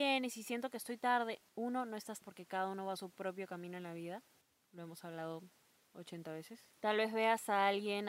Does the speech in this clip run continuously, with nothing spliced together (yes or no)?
no